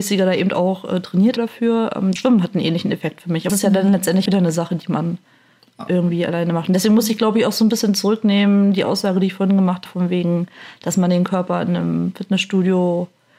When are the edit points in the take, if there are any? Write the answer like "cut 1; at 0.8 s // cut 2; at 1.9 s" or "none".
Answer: cut 1; at 1.4 s // cut 2; at 2.2 s // cut 3; at 3.5 s // cut 4; at 4.3 s // cut 5; at 9.9 s